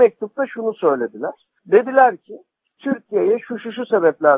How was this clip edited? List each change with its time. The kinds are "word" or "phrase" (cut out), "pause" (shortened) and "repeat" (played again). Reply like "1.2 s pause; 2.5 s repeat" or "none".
none